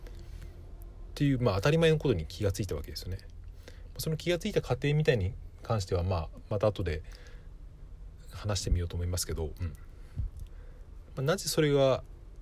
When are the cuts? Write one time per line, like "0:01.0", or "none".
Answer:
none